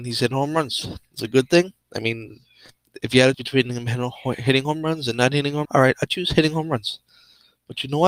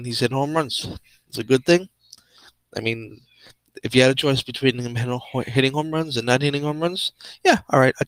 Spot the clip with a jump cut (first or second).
first